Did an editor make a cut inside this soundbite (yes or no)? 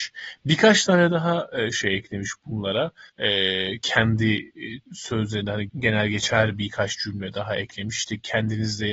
yes